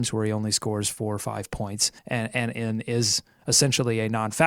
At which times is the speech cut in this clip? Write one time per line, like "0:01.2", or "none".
0:02.0